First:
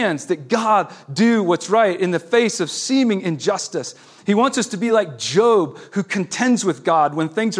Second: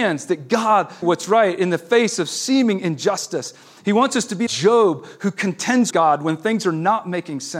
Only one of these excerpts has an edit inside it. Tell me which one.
second; 3 cuts; at 1.0 s, 4.5 s, 5.9 s

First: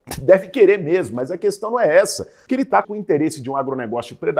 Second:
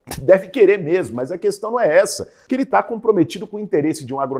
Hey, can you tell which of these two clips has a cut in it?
first; 1 cut; at 2.8 s

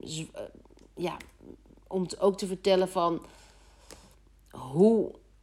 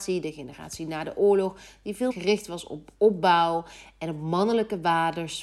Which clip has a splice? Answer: second; 1 cut; at 2.1 s

